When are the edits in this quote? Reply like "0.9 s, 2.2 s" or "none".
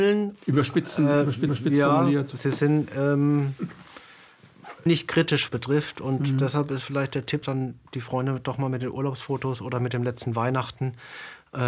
1.5 s, 4.9 s, 5.5 s, 7.4 s